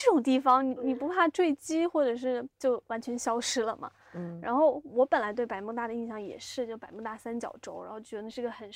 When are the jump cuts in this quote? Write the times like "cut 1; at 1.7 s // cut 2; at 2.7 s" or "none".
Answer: cut 1; at 2.5 s